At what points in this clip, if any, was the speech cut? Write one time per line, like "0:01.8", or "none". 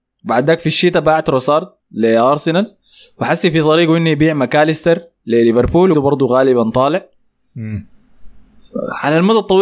0:01.8
0:05.9

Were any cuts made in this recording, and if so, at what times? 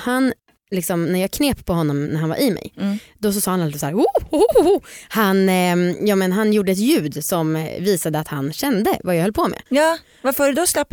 0:09.7

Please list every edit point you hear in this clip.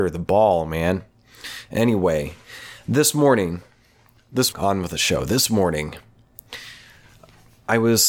0:04.5

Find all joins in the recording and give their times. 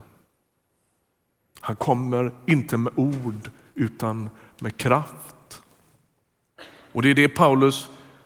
none

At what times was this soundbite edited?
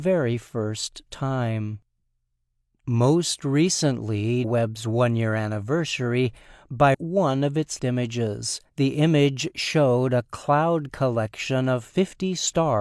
0:04.4
0:06.9
0:07.8
0:08.7

